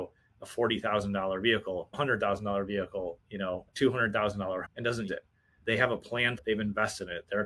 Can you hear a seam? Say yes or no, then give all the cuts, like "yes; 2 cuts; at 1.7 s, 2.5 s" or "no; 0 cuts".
yes; 7 cuts; at 1.9 s, 3.2 s, 3.7 s, 4.6 s, 5.1 s, 5.6 s, 6.4 s